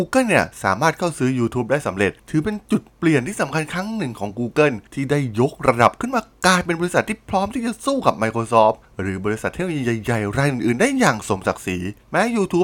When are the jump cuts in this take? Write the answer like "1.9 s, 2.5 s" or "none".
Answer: none